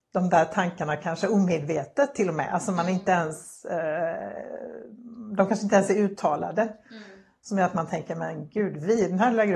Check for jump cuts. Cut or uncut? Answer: uncut